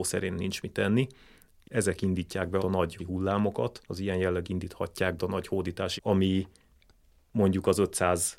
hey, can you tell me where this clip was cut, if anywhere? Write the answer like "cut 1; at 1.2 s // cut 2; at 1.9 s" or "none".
cut 1; at 1.6 s // cut 2; at 2.6 s // cut 3; at 3.0 s // cut 4; at 3.8 s // cut 5; at 4.4 s // cut 6; at 5.2 s // cut 7; at 6.0 s